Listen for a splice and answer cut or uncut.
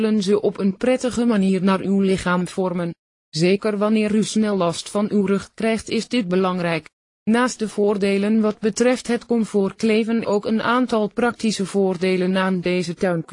cut